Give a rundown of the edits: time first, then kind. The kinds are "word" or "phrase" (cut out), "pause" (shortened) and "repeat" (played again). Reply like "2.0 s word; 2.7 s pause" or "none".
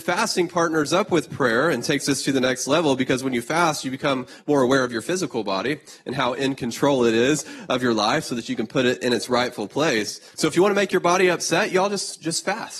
10.3 s pause